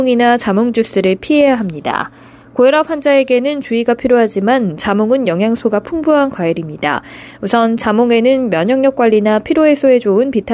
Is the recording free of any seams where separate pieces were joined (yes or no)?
yes